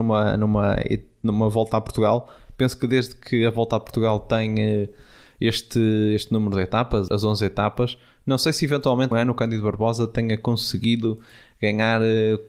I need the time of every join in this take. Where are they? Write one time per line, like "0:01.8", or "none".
0:07.1
0:09.1